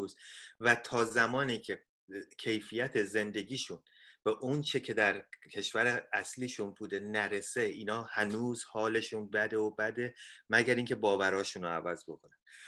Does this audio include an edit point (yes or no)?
no